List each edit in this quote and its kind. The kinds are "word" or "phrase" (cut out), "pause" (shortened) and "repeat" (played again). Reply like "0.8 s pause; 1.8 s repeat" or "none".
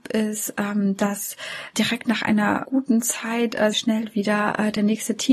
1.7 s word; 2.6 s word; 3.7 s phrase